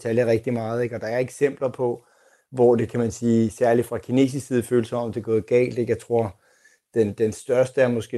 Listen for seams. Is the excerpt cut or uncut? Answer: uncut